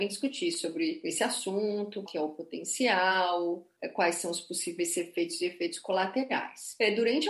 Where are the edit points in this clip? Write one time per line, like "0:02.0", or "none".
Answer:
0:02.1